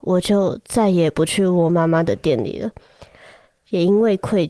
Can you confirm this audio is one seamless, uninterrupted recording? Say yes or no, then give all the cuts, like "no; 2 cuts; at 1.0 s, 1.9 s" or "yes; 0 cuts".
yes; 0 cuts